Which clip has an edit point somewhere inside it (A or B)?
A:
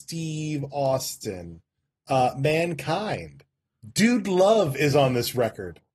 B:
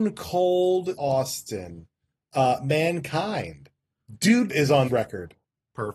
B